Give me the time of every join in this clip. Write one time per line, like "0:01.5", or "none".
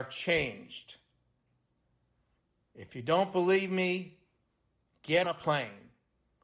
0:05.2